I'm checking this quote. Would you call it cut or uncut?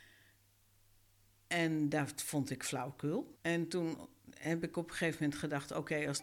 cut